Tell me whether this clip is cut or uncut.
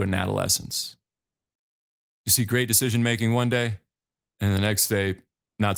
uncut